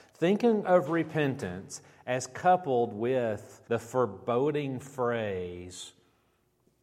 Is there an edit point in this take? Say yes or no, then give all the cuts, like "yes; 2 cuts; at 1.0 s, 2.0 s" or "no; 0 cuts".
yes; 1 cut; at 3.6 s